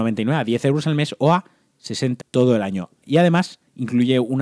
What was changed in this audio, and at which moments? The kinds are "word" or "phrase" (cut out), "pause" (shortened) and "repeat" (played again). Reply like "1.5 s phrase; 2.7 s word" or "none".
2.2 s word